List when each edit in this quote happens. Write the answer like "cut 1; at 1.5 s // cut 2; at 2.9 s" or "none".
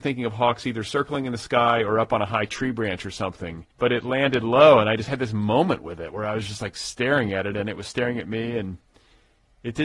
cut 1; at 3.7 s